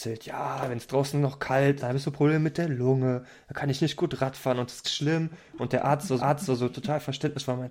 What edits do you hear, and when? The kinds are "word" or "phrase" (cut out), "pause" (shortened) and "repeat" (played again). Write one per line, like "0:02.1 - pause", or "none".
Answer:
0:01.8 - word
0:04.8 - word
0:06.2 - repeat